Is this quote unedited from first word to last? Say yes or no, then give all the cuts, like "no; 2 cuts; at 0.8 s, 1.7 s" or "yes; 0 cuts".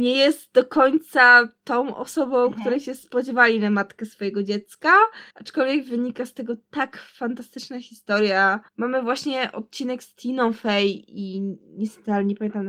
no; 2 cuts; at 5.3 s, 8.7 s